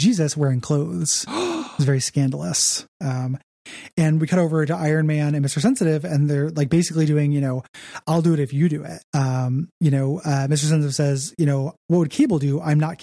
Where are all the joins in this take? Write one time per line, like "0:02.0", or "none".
0:02.9
0:09.1